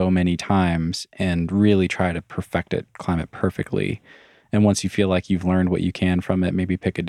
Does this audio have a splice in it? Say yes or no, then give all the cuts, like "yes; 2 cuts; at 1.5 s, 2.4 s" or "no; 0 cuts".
no; 0 cuts